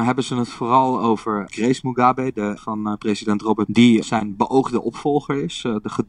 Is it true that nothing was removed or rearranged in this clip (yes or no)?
no